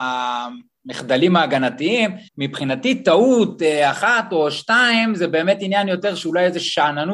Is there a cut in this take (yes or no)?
yes